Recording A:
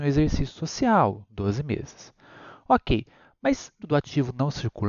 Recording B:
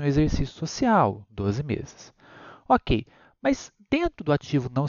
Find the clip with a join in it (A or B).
A